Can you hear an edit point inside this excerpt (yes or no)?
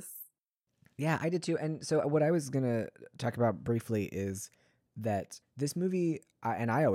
no